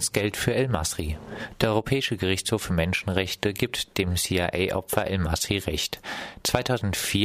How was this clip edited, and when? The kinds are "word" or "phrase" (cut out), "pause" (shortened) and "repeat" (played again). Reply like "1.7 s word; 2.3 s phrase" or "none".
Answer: none